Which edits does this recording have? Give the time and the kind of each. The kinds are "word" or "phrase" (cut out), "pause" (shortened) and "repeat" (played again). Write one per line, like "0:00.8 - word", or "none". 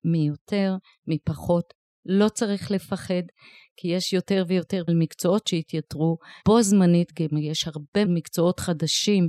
0:04.9 - word
0:06.4 - word
0:08.0 - word